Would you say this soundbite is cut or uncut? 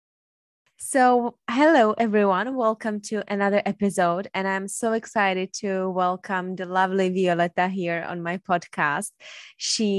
uncut